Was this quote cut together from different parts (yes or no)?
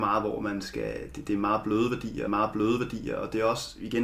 yes